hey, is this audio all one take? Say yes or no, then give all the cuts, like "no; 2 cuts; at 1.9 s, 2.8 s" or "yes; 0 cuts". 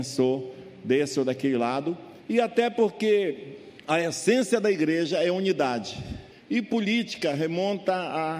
no; 3 cuts; at 2.2 s, 3.8 s, 6.3 s